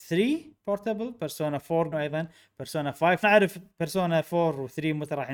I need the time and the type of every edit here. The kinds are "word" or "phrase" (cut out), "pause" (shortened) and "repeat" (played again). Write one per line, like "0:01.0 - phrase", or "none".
0:01.9 - word
0:03.2 - phrase